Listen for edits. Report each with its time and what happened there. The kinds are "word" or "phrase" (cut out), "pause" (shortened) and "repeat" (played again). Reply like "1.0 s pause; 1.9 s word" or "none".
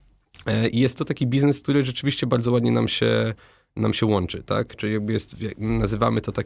none